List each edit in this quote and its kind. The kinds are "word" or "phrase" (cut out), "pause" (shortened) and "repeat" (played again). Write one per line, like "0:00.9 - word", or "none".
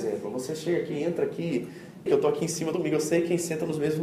0:02.1 - phrase
0:02.7 - word